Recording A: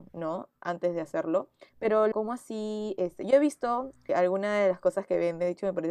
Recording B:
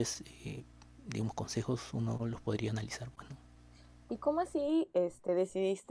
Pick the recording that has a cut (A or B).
A